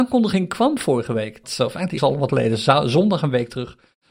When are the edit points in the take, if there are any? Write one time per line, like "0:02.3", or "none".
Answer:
0:01.4
0:02.0
0:02.3